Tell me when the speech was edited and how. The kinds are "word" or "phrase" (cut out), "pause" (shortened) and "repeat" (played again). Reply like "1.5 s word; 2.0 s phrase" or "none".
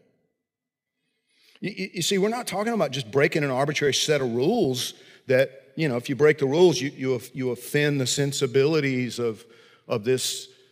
none